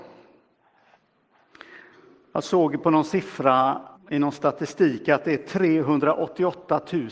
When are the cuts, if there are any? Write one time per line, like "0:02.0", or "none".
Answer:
0:03.9